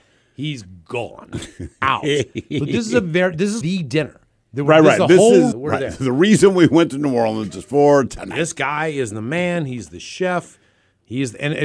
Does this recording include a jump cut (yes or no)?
yes